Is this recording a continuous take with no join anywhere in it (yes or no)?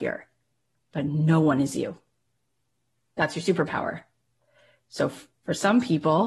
yes